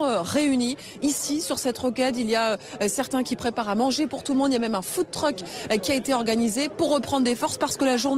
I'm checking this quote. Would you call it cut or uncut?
uncut